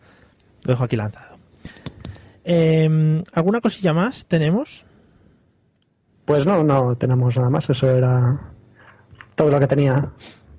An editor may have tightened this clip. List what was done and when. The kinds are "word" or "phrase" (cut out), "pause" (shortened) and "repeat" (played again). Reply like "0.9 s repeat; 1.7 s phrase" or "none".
none